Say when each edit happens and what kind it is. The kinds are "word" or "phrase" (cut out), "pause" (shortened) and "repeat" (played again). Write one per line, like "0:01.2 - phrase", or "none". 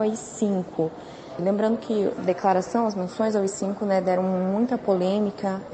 0:02.2 - word